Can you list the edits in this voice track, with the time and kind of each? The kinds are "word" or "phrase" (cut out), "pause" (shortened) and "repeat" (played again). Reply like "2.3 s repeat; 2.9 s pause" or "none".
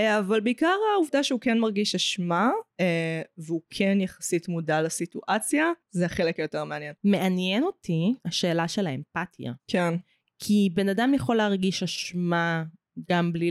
2.7 s pause; 5.8 s pause; 7.0 s pause; 8.2 s pause; 9.6 s pause